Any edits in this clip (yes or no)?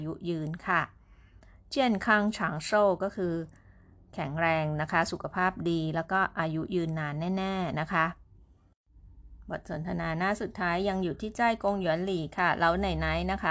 no